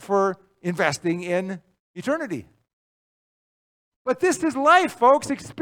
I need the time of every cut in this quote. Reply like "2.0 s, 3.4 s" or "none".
none